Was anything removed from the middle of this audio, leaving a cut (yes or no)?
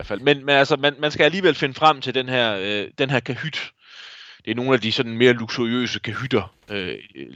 no